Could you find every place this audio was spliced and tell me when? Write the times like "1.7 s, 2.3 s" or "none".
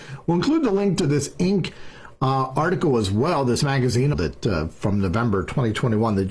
4.1 s